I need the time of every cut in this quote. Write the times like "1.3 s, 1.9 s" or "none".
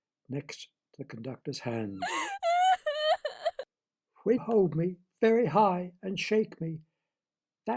4.4 s